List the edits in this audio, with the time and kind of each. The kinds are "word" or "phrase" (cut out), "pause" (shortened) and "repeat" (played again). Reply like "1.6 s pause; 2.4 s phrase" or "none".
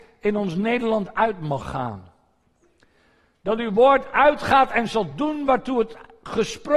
none